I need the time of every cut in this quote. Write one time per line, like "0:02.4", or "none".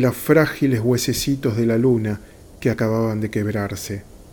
none